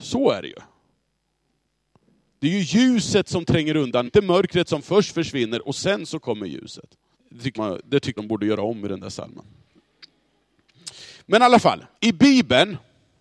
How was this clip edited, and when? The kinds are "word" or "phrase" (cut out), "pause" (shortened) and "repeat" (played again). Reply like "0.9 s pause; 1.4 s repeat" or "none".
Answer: 4.1 s phrase; 7.1 s pause; 7.6 s word; 8.2 s word; 12.0 s pause